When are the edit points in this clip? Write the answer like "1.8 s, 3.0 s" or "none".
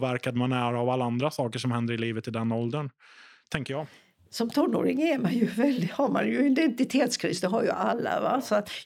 none